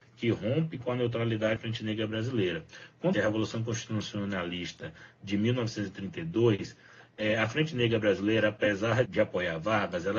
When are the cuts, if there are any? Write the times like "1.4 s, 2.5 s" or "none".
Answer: 1.6 s, 3.1 s, 9.0 s